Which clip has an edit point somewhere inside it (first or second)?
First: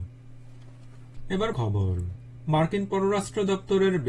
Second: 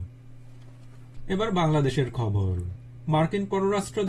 first